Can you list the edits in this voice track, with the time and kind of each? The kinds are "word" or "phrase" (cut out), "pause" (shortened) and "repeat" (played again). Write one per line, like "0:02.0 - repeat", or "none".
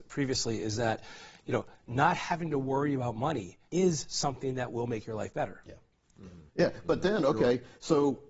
0:03.7 - pause
0:06.5 - pause

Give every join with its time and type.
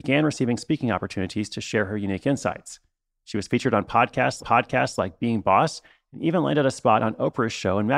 0:04.4 - repeat

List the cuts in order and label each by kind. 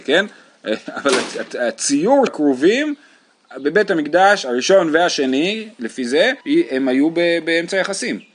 0:02.3 - word
0:06.4 - pause

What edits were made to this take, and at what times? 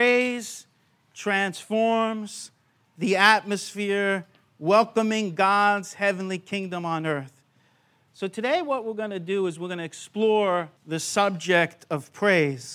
0:10.8 - pause

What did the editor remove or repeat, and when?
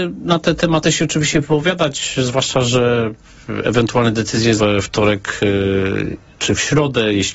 0:04.6 - word

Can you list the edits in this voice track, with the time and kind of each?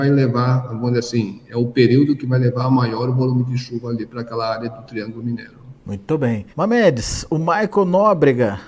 0:05.8 - pause
0:06.5 - pause

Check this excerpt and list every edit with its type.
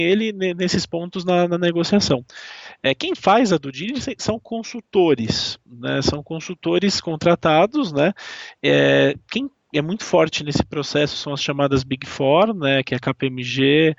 none

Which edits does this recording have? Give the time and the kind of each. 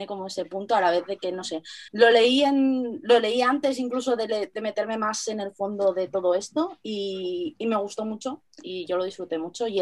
0:01.9 - pause

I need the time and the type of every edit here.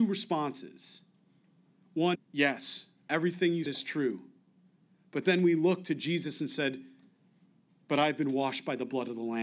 0:02.1 - word
0:03.6 - word

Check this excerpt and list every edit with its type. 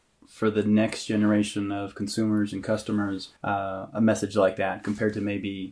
0:03.4 - pause

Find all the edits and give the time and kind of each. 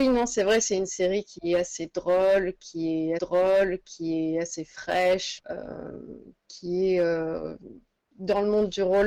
0:03.2 - repeat
0:05.4 - word

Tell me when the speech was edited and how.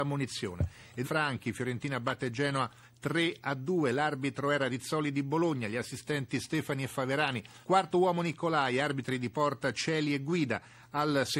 0:01.0 - phrase
0:07.6 - pause

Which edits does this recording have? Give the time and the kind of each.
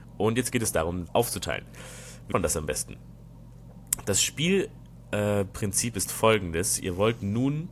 0:01.1 - word
0:02.3 - word

